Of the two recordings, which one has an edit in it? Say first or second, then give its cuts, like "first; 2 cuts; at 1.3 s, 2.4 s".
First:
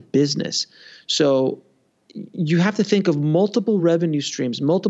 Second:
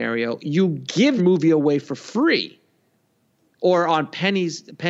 second; 1 cut; at 1.2 s